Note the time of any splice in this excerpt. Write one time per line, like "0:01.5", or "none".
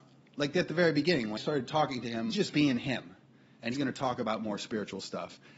0:01.4
0:02.3
0:03.7